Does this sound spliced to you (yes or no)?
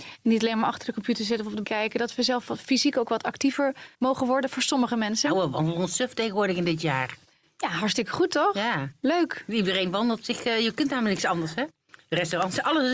yes